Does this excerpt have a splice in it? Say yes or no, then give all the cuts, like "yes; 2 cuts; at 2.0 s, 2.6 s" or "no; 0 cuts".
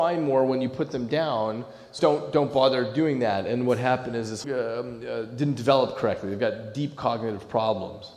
yes; 2 cuts; at 2.0 s, 4.4 s